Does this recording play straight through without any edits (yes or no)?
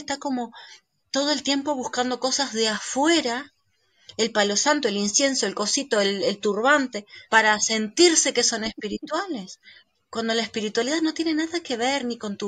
no